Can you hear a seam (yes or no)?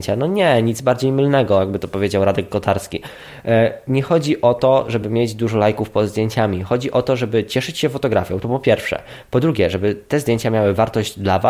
no